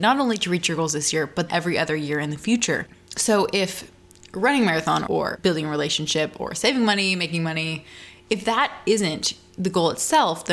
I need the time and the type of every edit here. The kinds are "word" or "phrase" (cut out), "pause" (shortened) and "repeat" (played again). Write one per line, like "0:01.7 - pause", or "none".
0:01.5 - word
0:05.1 - phrase